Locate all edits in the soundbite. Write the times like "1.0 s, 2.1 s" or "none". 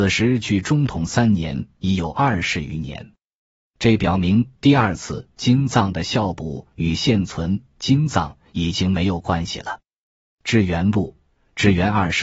none